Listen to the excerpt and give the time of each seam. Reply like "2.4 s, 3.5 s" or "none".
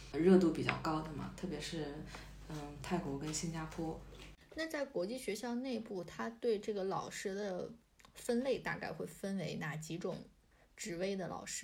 none

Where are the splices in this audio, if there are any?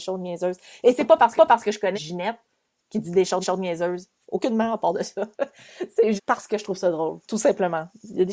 1.4 s, 1.9 s, 3.4 s, 5.3 s, 6.2 s, 7.2 s

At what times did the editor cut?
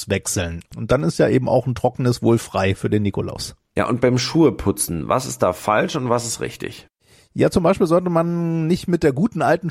none

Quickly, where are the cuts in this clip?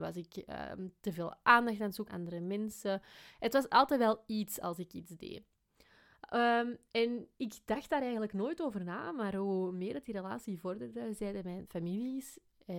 2.1 s

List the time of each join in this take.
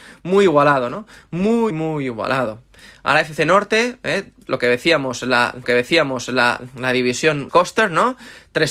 1.7 s, 4.5 s, 5.6 s, 7.5 s

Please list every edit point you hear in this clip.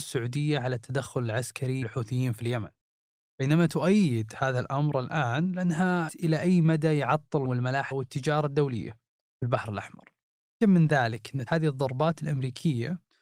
1.8 s, 6.1 s, 7.4 s, 7.9 s, 10.6 s, 11.5 s

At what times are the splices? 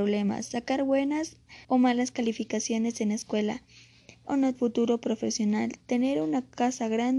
1.6 s, 4.2 s, 4.5 s

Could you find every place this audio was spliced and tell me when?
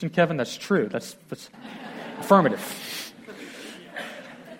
1.5 s

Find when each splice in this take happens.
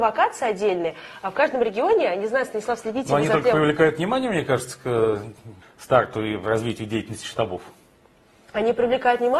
5.6 s

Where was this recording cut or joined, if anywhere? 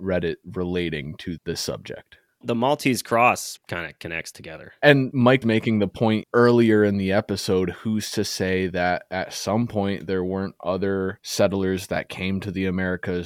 3.6 s, 4.3 s, 5.4 s

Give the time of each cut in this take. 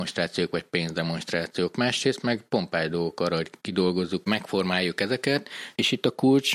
4.2 s

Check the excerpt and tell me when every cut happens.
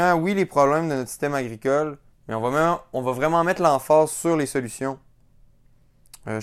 2.1 s

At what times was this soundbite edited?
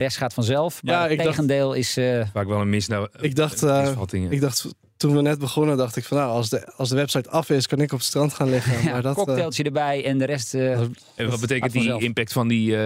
none

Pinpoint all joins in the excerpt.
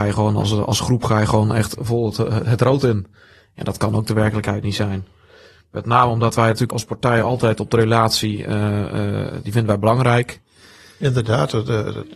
6.7 s

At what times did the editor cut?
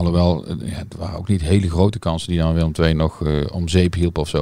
3.0 s

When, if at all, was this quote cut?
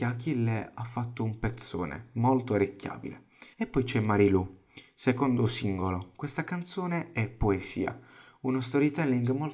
3.5 s

